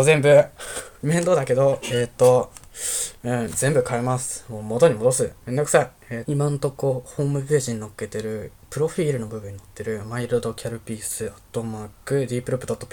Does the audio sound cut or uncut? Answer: cut